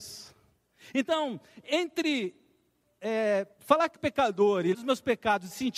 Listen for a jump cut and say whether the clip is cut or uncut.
cut